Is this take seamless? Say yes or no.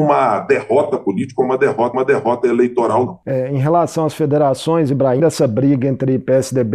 no